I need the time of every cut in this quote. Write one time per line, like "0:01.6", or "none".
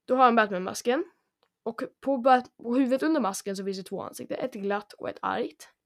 none